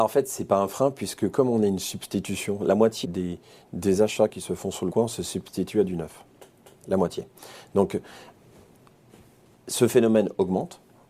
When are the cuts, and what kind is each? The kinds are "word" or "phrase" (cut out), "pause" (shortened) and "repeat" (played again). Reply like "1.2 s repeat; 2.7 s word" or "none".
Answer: 3.0 s word; 4.9 s word